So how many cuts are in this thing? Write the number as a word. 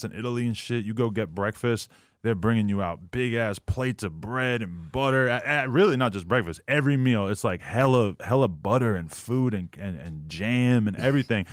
zero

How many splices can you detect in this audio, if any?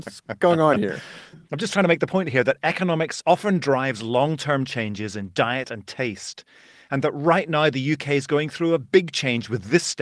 zero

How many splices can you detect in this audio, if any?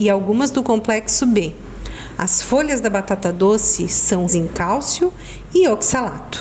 one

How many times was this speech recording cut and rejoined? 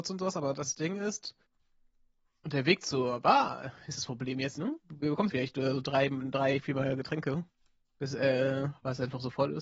two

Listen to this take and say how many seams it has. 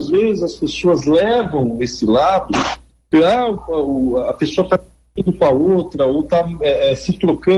zero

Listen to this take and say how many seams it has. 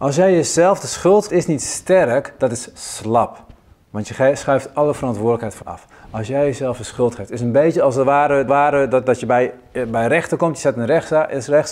three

